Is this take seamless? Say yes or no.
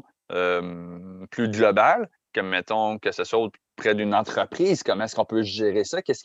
yes